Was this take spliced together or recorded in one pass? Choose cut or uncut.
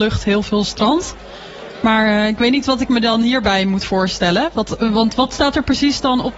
uncut